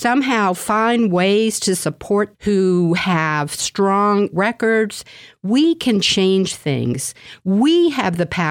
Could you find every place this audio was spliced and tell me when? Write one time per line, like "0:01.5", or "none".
0:02.3
0:04.3